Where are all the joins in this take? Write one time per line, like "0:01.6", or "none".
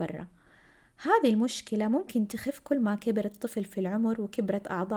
none